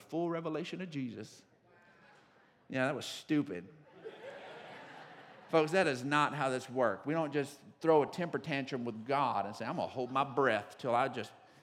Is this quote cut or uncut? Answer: uncut